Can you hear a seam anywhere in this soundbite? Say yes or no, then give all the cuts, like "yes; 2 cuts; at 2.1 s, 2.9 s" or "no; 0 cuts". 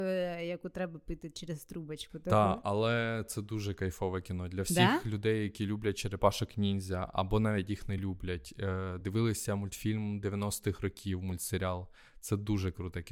no; 0 cuts